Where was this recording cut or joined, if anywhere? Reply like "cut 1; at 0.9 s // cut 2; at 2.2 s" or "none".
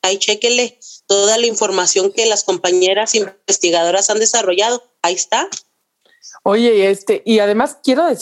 none